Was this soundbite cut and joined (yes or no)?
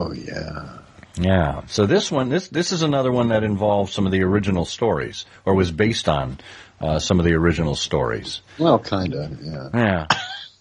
yes